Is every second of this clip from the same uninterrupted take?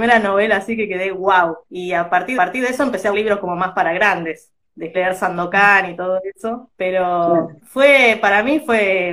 no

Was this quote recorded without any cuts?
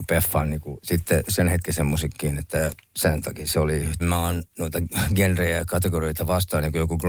no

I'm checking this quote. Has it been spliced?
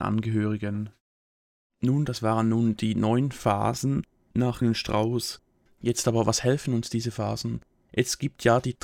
yes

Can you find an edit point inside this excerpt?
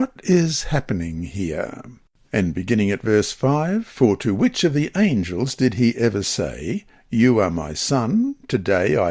no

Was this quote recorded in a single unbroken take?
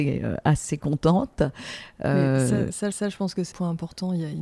no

